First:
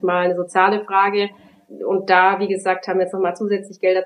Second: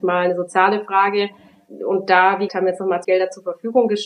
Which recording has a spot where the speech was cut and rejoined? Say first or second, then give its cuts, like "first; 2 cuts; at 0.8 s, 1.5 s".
second; 2 cuts; at 2.5 s, 3.0 s